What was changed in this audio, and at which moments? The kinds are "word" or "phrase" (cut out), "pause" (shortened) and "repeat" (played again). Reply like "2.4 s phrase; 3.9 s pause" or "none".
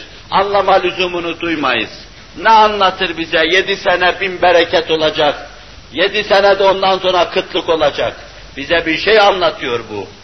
none